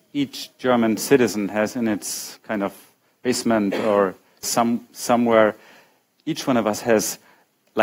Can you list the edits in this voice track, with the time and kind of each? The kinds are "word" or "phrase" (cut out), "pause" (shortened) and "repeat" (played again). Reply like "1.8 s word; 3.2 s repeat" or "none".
2.4 s word; 4.4 s phrase